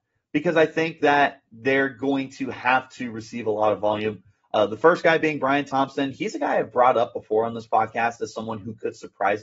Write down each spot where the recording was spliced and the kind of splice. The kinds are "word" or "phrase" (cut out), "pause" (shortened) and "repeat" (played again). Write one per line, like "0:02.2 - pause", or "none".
none